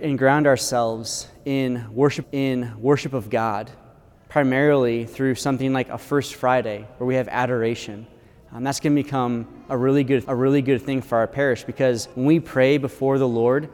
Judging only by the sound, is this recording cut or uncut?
cut